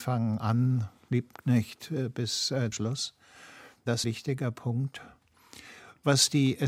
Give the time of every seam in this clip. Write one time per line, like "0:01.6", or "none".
0:01.1
0:02.7
0:04.0